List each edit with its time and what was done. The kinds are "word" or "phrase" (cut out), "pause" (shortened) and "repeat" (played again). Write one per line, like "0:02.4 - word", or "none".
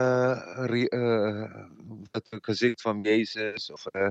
0:02.1 - word